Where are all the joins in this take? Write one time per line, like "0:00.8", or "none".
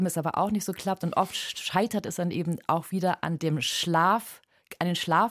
none